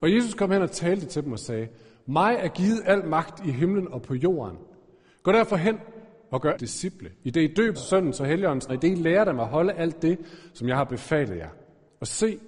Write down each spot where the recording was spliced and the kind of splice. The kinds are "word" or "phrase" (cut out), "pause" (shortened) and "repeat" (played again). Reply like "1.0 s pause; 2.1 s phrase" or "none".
6.5 s phrase; 7.7 s phrase; 8.7 s word